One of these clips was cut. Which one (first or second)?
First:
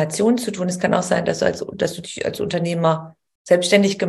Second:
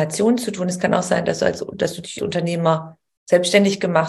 second